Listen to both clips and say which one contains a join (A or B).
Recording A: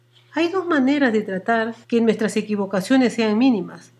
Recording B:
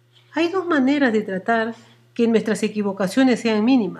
A